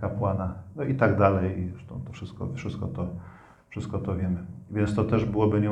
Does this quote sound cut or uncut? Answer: uncut